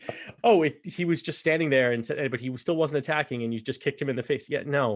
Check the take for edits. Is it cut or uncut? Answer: uncut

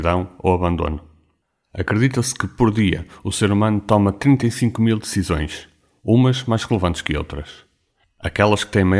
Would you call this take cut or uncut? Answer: uncut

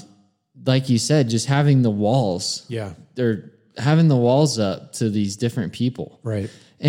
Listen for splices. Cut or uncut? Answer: uncut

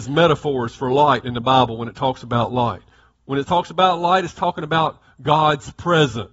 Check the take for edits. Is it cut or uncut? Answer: uncut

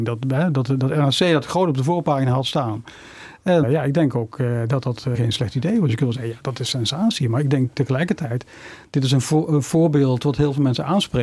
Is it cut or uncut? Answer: cut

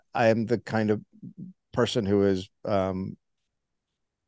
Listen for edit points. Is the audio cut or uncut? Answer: uncut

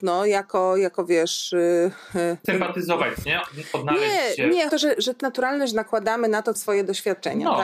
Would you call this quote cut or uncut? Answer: cut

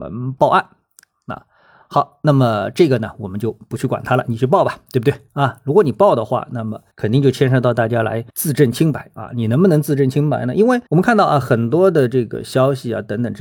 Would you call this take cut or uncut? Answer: cut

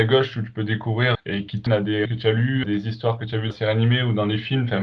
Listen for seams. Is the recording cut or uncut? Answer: cut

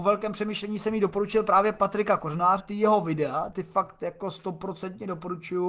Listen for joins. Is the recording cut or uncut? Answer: cut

